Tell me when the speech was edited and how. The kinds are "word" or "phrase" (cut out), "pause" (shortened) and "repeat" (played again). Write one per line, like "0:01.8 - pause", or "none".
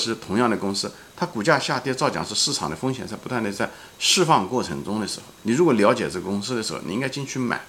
0:05.4 - pause